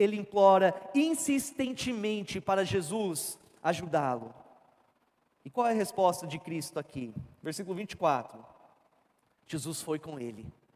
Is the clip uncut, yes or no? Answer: yes